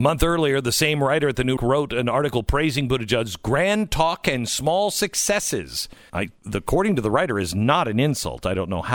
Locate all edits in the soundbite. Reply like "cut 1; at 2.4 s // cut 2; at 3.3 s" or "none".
cut 1; at 1.6 s // cut 2; at 6.1 s